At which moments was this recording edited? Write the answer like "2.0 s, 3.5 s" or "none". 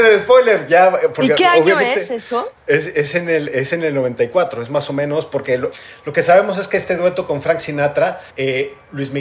2.6 s, 8.3 s